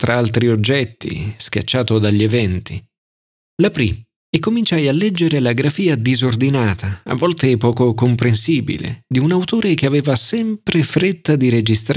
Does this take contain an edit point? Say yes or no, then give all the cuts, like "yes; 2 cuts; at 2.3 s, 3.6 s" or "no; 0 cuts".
no; 0 cuts